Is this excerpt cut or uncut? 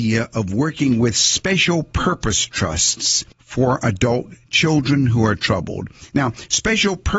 cut